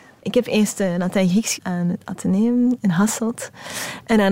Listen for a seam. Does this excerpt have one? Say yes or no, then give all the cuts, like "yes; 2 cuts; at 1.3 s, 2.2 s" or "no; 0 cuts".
yes; 1 cut; at 1.6 s